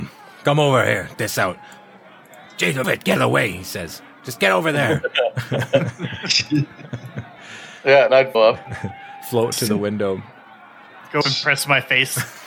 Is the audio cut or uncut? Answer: cut